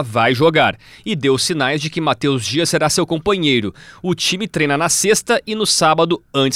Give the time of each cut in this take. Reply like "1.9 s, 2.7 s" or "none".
none

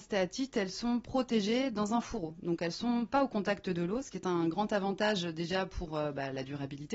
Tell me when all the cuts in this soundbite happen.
none

